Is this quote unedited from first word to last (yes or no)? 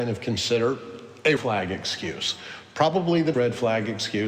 no